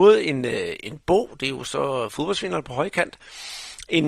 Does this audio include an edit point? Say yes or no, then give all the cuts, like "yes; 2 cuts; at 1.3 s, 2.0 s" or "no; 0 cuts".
no; 0 cuts